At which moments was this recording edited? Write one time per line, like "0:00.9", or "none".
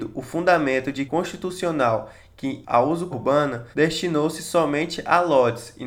0:01.1
0:02.6
0:03.1
0:03.7